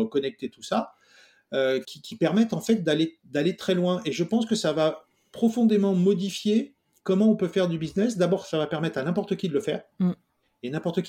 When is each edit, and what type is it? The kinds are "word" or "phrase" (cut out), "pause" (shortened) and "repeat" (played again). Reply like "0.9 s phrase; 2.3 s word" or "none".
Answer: 1.8 s word; 9.9 s pause